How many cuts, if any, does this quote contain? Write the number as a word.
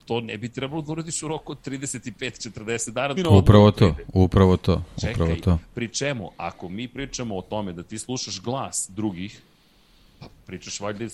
one